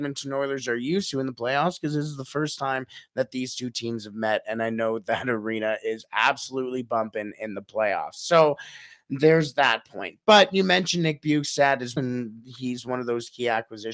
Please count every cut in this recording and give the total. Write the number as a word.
one